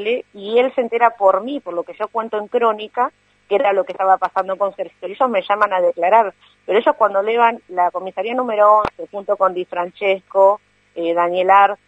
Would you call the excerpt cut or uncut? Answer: uncut